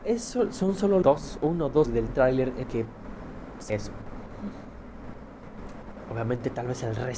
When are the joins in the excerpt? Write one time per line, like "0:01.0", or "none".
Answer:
0:01.0
0:01.8
0:02.6
0:03.7